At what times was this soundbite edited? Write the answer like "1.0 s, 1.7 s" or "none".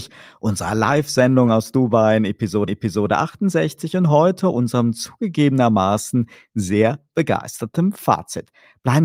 2.7 s